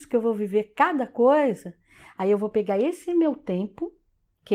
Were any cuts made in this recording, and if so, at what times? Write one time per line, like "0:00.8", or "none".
none